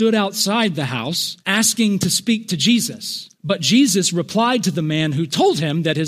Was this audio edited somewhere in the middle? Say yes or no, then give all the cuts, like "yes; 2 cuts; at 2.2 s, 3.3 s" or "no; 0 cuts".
yes; 2 cuts; at 1.4 s, 3.3 s